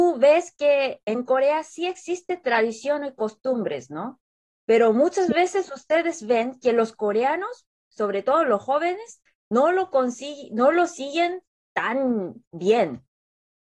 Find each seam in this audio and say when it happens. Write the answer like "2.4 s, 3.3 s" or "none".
none